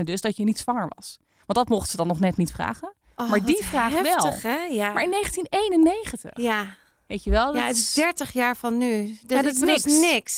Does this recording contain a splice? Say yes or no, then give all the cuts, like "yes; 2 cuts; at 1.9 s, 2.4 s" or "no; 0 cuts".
no; 0 cuts